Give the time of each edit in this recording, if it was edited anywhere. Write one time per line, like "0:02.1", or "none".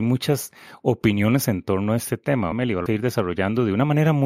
0:01.4
0:02.5
0:02.9